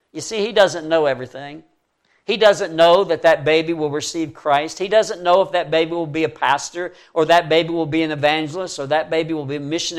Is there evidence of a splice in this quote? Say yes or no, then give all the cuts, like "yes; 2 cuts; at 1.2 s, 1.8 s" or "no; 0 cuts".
no; 0 cuts